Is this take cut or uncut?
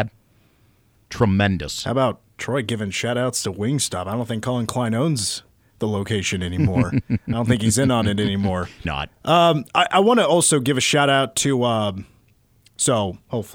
cut